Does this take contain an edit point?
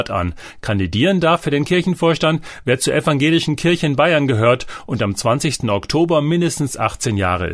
no; 0 cuts

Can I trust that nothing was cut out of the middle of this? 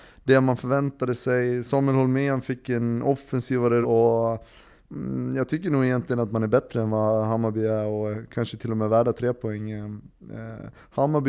no; 1 cut; at 3.8 s

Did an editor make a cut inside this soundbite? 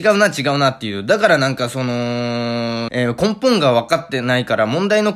yes; 1 cut; at 2.9 s

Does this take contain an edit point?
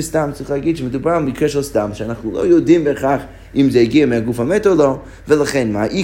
no; 0 cuts

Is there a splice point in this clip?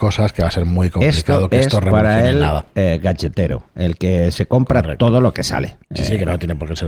yes; 2 cuts; at 2.7 s, 5.8 s

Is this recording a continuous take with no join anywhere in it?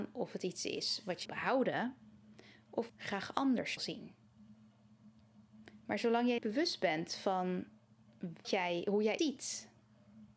no; 6 cuts; at 1.3 s, 2.9 s, 3.8 s, 6.4 s, 8.4 s, 9.2 s

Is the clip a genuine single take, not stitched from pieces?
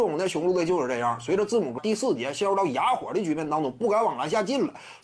no; 1 cut; at 1.8 s

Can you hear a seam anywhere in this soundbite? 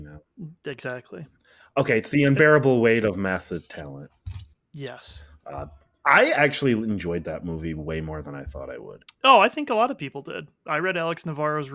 no; 0 cuts

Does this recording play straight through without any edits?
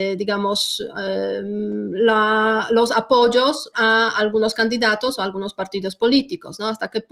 no; 1 cut; at 3.7 s

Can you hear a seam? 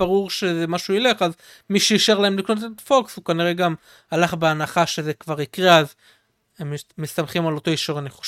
no; 0 cuts

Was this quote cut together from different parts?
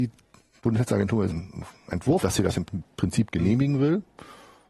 yes; 3 cuts; at 1.3 s, 2.2 s, 2.7 s

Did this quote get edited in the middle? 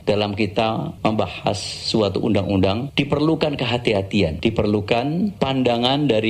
no; 0 cuts

